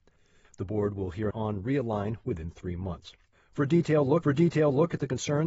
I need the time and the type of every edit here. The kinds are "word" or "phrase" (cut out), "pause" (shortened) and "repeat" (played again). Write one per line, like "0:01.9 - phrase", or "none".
0:01.3 - phrase
0:04.2 - repeat